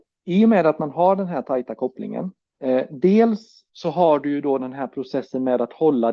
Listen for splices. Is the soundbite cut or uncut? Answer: cut